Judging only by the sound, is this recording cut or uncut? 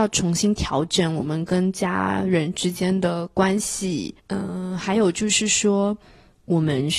cut